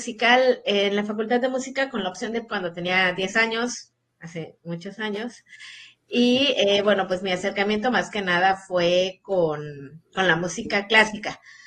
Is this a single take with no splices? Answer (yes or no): no